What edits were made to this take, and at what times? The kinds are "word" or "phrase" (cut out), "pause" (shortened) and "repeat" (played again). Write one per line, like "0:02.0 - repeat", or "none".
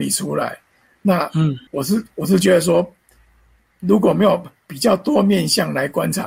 0:01.7 - pause